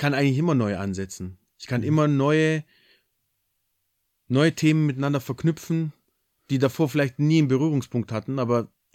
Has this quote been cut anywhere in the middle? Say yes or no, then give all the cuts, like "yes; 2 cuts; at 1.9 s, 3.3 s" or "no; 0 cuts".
no; 0 cuts